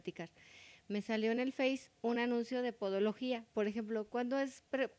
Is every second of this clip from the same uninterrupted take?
yes; 0 cuts

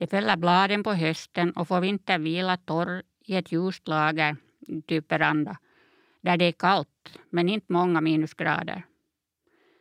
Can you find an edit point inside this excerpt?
yes; 1 cut; at 7.2 s

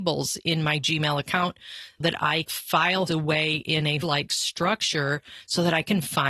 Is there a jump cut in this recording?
yes; 4 cuts; at 2.0 s, 2.5 s, 3.1 s, 4.0 s

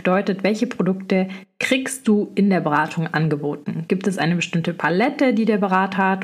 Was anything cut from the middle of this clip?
no; 0 cuts

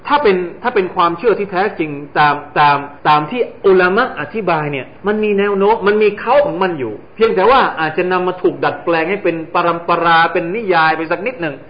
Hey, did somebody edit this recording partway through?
yes; 3 cuts; at 3.0 s, 5.0 s, 7.1 s

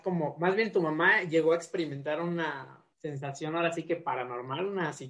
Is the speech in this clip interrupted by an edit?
yes; 1 cut; at 2.9 s

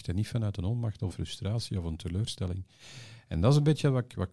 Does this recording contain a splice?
yes; 1 cut; at 1.1 s

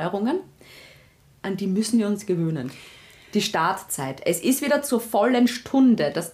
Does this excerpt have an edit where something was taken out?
no; 0 cuts

